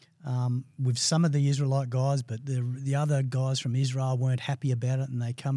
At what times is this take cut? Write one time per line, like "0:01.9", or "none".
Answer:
none